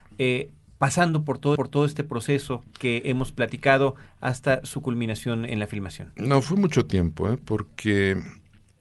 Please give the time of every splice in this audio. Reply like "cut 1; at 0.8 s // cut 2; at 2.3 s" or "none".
cut 1; at 1.6 s // cut 2; at 2.7 s // cut 3; at 6.4 s

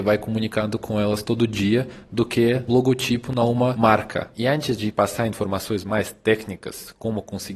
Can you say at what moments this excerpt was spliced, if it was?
cut 1; at 2.7 s

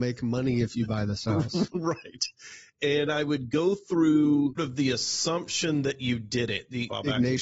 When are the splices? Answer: cut 1; at 4.6 s

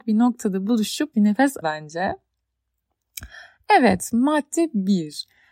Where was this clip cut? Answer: cut 1; at 1.1 s // cut 2; at 1.6 s

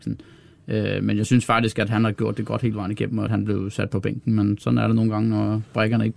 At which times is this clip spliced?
cut 1; at 3.3 s

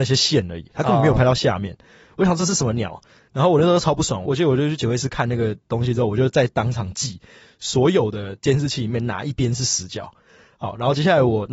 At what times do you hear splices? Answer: none

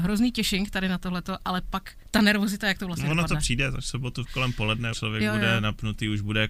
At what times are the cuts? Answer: cut 1; at 4.9 s

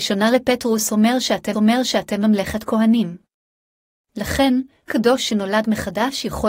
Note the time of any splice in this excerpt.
cut 1; at 1.5 s // cut 2; at 4.9 s

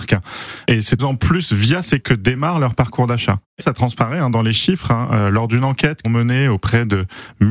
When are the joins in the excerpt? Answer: cut 1; at 1.0 s // cut 2; at 2.0 s // cut 3; at 3.6 s // cut 4; at 6.0 s

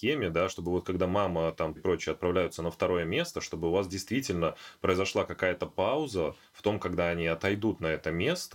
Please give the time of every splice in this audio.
cut 1; at 1.8 s

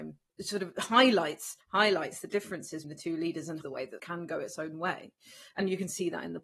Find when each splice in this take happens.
cut 1; at 1.6 s // cut 2; at 2.8 s // cut 3; at 3.6 s // cut 4; at 4.0 s

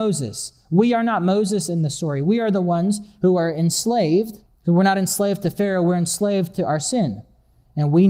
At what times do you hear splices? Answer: cut 1; at 4.5 s

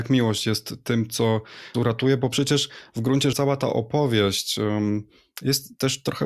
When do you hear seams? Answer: cut 1; at 1.7 s // cut 2; at 3.3 s

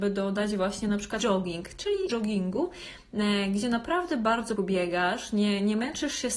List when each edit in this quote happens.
cut 1; at 1.2 s // cut 2; at 2.1 s // cut 3; at 4.6 s

